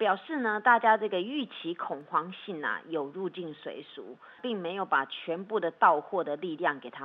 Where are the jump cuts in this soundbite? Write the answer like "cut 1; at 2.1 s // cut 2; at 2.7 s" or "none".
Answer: cut 1; at 4.4 s